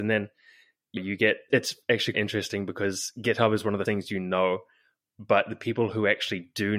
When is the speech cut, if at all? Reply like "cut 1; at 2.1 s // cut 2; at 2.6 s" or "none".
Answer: cut 1; at 1.0 s // cut 2; at 1.5 s // cut 3; at 2.1 s // cut 4; at 3.9 s